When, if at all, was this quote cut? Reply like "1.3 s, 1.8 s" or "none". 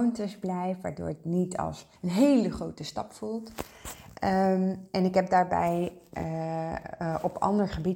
2.0 s